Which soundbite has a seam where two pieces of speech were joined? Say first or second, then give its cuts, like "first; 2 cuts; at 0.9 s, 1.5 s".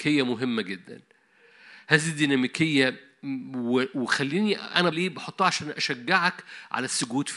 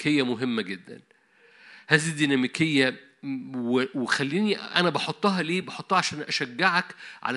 first; 1 cut; at 4.9 s